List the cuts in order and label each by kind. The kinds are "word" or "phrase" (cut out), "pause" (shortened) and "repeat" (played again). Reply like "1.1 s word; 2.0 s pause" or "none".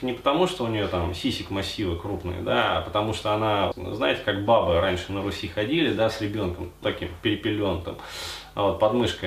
3.7 s word; 6.8 s word